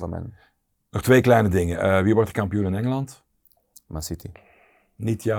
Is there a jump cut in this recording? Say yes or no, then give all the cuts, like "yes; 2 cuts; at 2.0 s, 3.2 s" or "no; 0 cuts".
no; 0 cuts